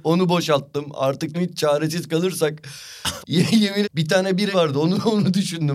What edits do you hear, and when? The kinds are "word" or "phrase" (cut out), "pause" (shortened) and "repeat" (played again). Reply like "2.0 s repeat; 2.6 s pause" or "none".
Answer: 1.3 s word; 3.2 s word; 3.8 s word; 4.5 s word